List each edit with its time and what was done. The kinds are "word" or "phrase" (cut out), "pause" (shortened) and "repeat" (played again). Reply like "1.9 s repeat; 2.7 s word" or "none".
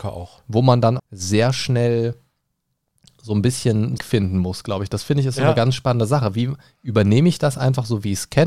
1.0 s word; 4.0 s phrase